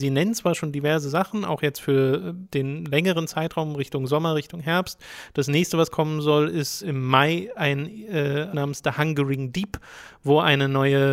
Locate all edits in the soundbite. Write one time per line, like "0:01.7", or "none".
0:02.5
0:06.8
0:08.5